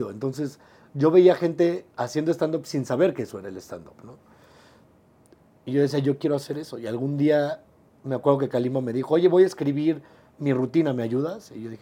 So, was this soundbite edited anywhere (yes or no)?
no